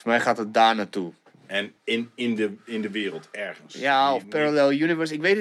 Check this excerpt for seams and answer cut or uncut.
uncut